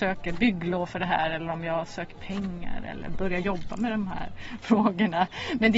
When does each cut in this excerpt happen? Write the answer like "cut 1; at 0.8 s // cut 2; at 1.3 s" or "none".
none